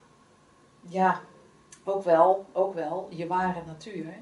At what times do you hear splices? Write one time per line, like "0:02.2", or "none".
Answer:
none